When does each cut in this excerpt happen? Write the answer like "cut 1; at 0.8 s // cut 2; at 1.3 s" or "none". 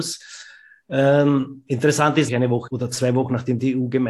cut 1; at 2.3 s // cut 2; at 2.7 s